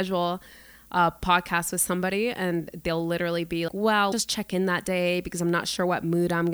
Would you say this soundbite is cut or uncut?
cut